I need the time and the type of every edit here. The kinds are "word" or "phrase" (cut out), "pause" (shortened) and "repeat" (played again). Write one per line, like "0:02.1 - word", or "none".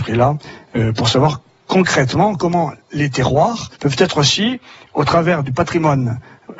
0:03.8 - pause